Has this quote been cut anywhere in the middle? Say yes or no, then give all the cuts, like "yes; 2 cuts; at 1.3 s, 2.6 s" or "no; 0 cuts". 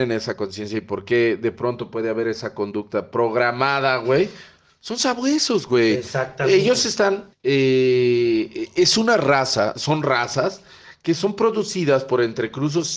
yes; 1 cut; at 7.3 s